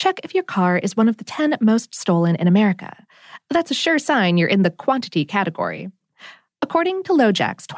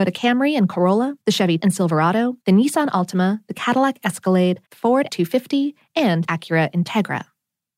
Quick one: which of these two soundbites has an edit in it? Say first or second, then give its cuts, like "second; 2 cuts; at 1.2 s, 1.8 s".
second; 6 cuts; at 1.2 s, 1.6 s, 2.4 s, 4.6 s, 5.1 s, 6.3 s